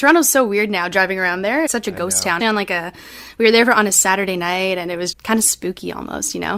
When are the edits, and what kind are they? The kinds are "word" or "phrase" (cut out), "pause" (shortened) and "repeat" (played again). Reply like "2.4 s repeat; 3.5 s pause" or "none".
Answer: 1.7 s phrase; 2.4 s word; 5.1 s word